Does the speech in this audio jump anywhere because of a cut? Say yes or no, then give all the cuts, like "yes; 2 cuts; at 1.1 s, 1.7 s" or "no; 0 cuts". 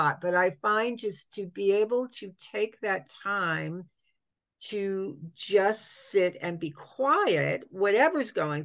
no; 0 cuts